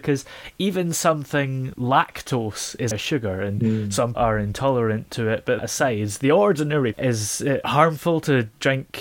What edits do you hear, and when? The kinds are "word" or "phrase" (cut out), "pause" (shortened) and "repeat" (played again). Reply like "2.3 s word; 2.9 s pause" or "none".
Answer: 1.7 s word; 2.9 s word; 4.1 s word; 5.6 s word; 6.9 s word